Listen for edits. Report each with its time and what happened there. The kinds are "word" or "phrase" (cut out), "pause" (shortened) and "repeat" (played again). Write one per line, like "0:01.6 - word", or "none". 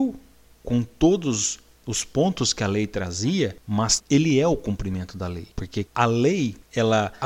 0:04.0 - word